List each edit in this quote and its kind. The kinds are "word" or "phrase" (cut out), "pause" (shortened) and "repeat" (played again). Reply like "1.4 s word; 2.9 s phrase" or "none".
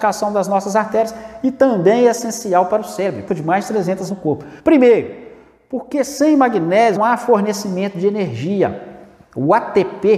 3.3 s word; 4.1 s word; 4.6 s pause; 7.0 s word